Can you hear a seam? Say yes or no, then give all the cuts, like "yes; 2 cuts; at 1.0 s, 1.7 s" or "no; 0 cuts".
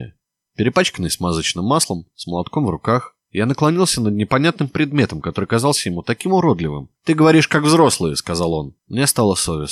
yes; 3 cuts; at 3.2 s, 7.0 s, 8.8 s